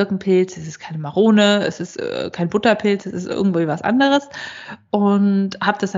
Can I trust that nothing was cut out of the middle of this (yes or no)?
yes